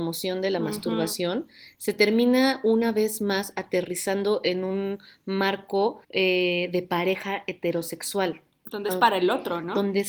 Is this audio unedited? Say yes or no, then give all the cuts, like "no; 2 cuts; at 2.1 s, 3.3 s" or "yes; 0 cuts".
no; 1 cut; at 6.0 s